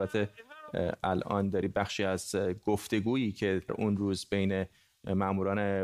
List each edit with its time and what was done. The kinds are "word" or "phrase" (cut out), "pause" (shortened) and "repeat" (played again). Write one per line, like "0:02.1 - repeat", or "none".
0:03.7 - word